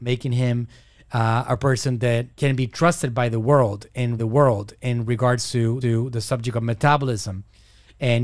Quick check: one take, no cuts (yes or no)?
no